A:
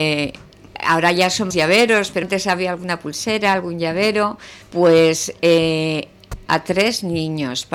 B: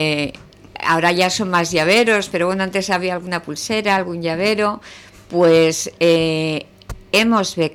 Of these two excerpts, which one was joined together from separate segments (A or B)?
A